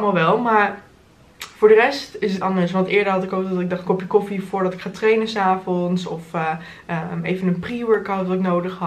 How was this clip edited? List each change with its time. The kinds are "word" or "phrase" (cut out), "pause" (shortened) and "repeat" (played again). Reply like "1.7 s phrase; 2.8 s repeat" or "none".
2.4 s phrase; 3.9 s phrase